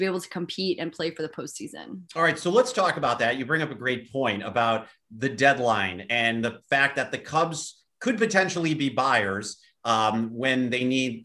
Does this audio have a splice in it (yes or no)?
no